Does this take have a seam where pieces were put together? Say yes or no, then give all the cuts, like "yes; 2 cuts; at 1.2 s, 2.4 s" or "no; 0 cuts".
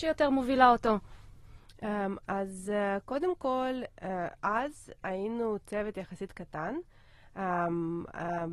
no; 0 cuts